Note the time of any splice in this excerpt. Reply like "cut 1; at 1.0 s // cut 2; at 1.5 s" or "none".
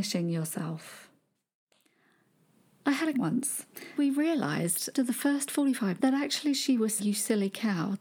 cut 1; at 3.1 s // cut 2; at 4.0 s // cut 3; at 4.9 s // cut 4; at 6.0 s // cut 5; at 7.0 s